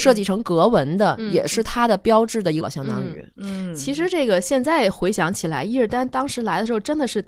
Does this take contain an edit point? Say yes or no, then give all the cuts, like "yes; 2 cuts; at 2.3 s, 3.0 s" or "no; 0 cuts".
yes; 1 cut; at 2.6 s